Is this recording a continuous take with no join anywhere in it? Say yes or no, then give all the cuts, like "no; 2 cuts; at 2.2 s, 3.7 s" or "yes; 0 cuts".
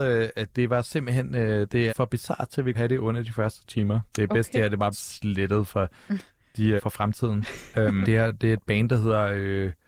no; 6 cuts; at 1.9 s, 2.7 s, 3.6 s, 4.9 s, 6.8 s, 8.0 s